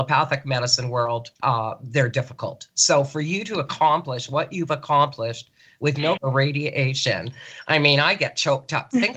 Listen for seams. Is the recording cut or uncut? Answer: cut